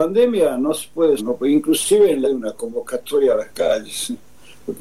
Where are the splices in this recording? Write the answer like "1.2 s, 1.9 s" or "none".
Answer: 1.2 s, 2.2 s